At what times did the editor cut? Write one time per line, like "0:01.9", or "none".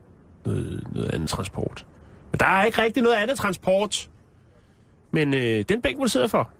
0:01.3